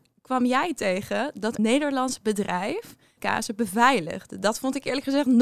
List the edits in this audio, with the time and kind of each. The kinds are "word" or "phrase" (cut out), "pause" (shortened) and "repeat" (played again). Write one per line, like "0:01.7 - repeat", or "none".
0:01.6 - word
0:03.2 - word